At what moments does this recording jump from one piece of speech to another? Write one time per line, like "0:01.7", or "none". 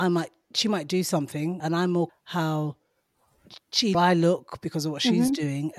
0:01.6
0:02.1
0:03.9